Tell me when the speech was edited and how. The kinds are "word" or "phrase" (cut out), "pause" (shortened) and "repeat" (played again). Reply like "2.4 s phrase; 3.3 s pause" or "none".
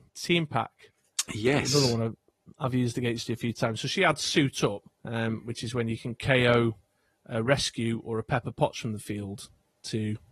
none